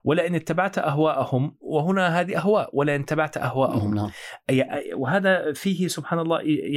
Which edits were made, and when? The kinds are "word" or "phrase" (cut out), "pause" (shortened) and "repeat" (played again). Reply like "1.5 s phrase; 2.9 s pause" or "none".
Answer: none